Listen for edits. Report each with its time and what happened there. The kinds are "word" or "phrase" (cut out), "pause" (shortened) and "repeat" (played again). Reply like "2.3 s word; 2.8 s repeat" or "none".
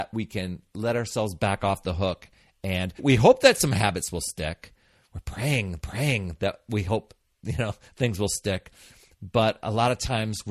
3.0 s word; 5.8 s repeat